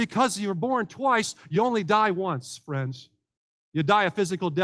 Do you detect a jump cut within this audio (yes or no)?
no